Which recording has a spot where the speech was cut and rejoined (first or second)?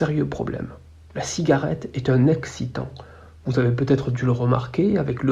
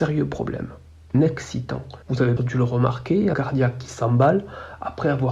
second